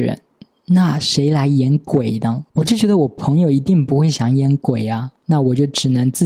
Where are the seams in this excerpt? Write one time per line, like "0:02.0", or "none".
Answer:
0:02.5
0:05.2

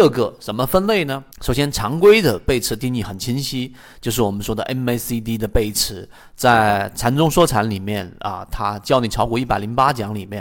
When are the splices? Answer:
0:01.3

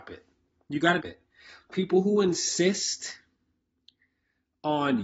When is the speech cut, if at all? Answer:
0:01.0

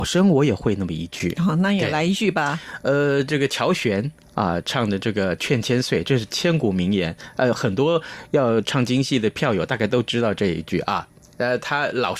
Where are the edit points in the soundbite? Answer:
none

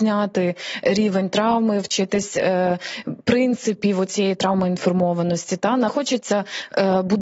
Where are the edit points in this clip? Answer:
0:05.9

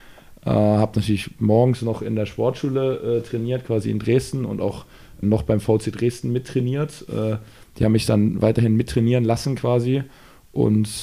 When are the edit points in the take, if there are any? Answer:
0:05.2

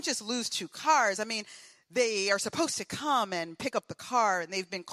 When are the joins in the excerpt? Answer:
none

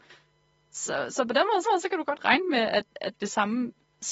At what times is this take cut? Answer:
0:01.6

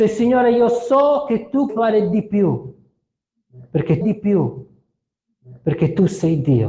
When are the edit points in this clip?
0:01.7
0:04.0

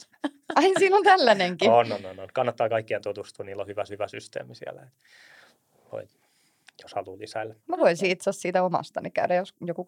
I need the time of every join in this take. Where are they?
0:03.9
0:07.6

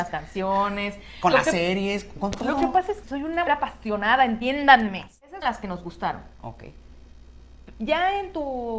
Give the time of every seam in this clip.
0:03.0
0:03.5
0:05.4

